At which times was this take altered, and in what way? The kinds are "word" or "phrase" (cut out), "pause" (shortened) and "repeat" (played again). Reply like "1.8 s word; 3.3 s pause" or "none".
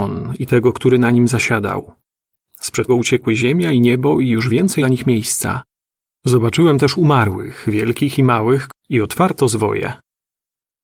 2.9 s word; 4.8 s phrase; 8.7 s phrase